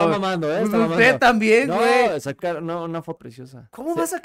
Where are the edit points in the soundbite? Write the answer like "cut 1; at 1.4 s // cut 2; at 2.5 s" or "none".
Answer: cut 1; at 2.4 s // cut 2; at 3.2 s